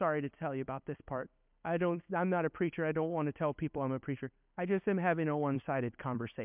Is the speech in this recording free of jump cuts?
yes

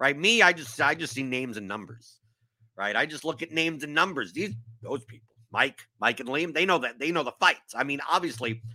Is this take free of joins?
yes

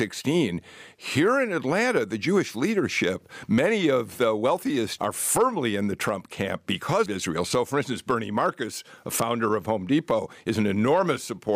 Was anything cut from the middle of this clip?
yes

